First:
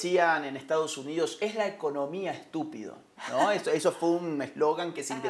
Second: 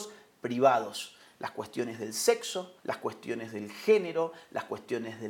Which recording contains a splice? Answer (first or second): second